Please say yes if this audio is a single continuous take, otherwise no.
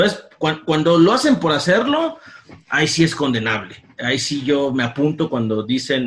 yes